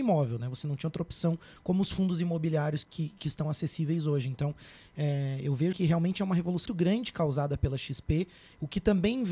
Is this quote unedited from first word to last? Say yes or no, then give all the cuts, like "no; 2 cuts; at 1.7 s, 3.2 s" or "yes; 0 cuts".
no; 3 cuts; at 2.8 s, 5.7 s, 6.7 s